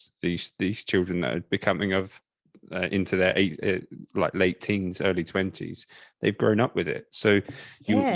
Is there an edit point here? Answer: no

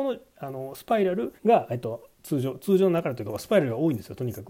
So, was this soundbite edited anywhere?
yes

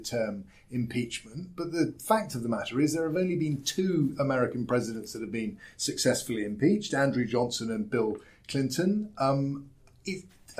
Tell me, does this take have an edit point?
no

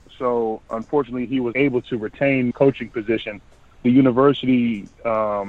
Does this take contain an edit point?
yes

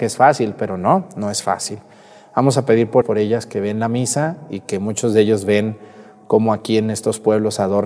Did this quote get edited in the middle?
yes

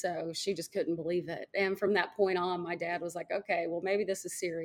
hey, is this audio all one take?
yes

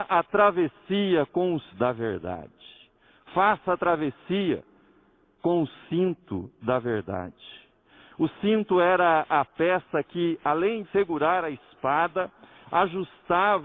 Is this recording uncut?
no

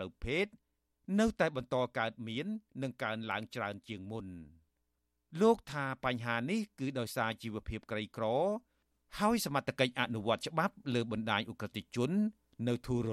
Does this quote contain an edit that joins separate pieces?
no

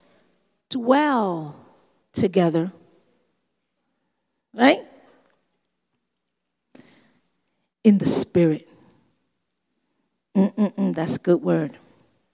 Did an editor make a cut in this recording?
no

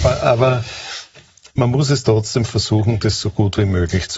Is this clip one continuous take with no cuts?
no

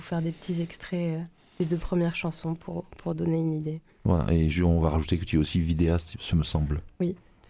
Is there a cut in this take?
no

